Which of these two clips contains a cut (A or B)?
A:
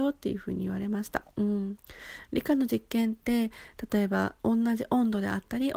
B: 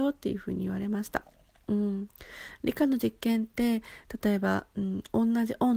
A